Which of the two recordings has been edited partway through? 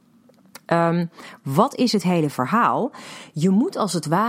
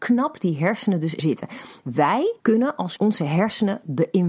second; 3 cuts; at 1.2 s, 2.4 s, 3.0 s

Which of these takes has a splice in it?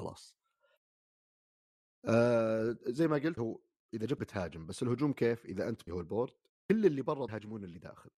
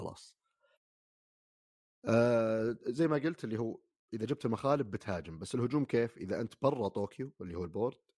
first; 5 cuts; at 3.4 s, 4.2 s, 5.9 s, 6.5 s, 7.3 s

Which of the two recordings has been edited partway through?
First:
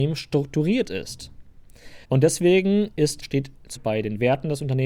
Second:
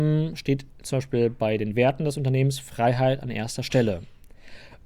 first; 3 cuts; at 2.0 s, 3.2 s, 3.8 s

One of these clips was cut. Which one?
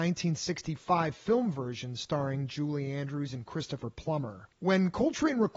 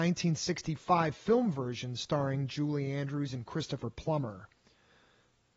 first; 1 cut; at 4.5 s

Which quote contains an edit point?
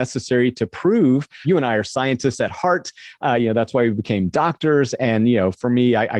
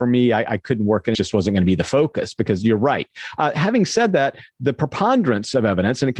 second; 1 cut; at 1.1 s

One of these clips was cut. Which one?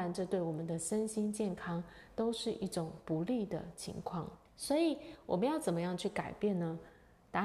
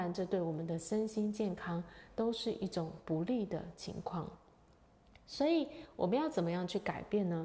first; 1 cut; at 4.4 s

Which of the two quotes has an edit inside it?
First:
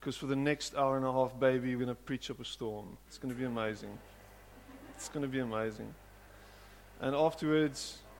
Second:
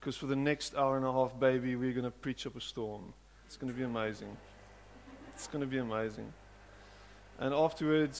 first; 2 cuts; at 1.8 s, 3.0 s

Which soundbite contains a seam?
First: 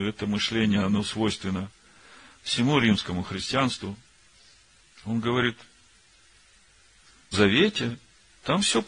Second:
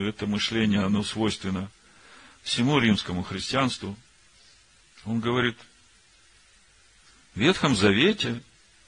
first; 1 cut; at 7.3 s

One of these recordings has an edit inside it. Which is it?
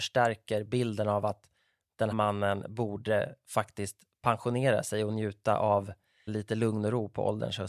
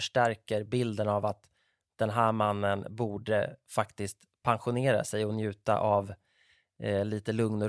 first; 2 cuts; at 2.1 s, 6.3 s

